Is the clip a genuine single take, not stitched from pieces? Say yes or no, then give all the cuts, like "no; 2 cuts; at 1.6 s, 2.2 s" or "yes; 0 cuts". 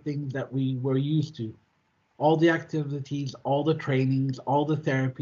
yes; 0 cuts